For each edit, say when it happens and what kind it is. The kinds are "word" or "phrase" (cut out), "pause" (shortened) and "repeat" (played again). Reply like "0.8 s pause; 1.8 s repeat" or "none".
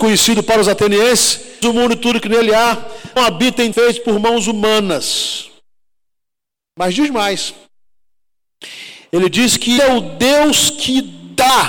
1.6 s word; 3.2 s word; 3.7 s word; 9.8 s word